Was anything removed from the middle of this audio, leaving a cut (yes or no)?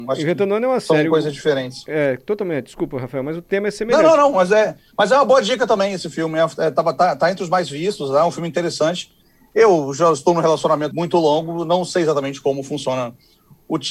yes